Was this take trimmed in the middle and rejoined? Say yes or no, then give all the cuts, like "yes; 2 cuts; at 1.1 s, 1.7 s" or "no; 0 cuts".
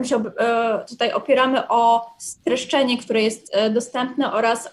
no; 0 cuts